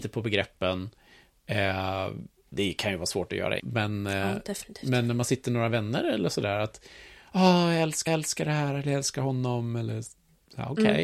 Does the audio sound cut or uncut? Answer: cut